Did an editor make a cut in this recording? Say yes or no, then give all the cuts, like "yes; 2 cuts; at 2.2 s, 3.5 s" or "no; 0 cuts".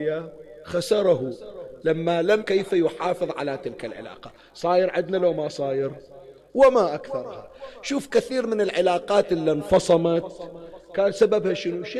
yes; 1 cut; at 2.4 s